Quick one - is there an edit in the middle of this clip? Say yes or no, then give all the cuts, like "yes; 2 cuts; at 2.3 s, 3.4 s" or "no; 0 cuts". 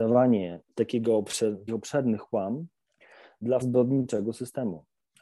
yes; 2 cuts; at 1.7 s, 3.6 s